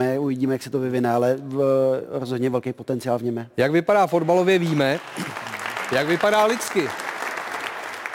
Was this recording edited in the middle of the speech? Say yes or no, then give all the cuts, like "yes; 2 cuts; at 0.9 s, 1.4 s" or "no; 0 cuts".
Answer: no; 0 cuts